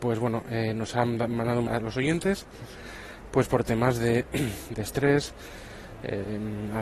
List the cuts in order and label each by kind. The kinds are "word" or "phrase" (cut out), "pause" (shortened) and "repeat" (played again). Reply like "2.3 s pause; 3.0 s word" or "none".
1.7 s phrase; 4.7 s word